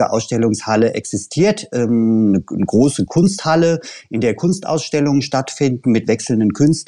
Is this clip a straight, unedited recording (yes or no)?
yes